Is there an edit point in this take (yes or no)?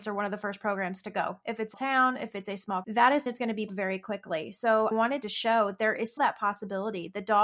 yes